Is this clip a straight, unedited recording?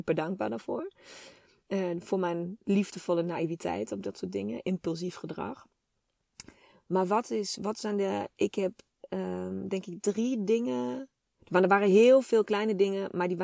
yes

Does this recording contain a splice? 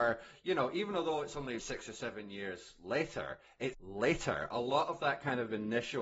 yes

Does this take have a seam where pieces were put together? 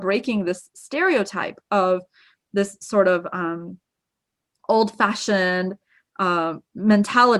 no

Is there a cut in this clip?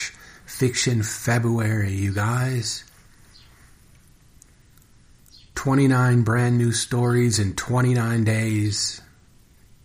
no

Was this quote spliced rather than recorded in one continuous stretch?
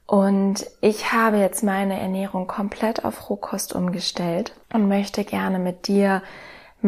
yes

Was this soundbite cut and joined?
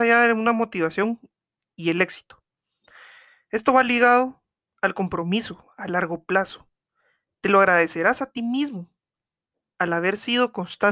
no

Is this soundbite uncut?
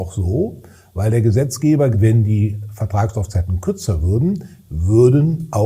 no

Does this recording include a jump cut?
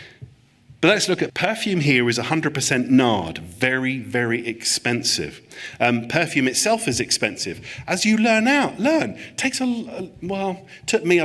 yes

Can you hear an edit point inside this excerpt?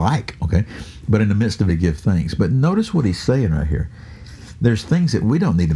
yes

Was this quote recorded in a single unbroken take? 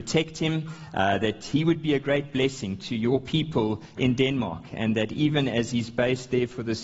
yes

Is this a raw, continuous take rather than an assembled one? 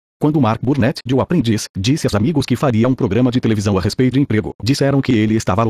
no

